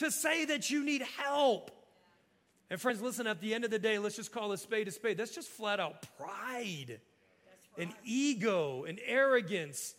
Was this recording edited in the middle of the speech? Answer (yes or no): no